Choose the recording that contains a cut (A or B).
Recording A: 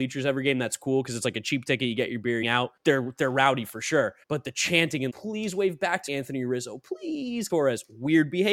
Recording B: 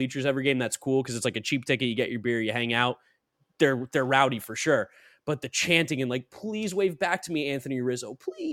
A